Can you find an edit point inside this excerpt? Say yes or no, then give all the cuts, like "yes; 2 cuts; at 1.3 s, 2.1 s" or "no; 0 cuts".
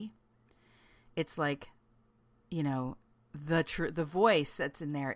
no; 0 cuts